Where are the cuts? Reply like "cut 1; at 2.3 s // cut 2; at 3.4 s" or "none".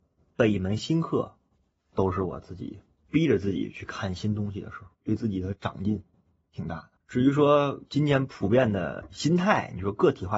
cut 1; at 1.5 s // cut 2; at 2.9 s // cut 3; at 4.9 s // cut 4; at 7.0 s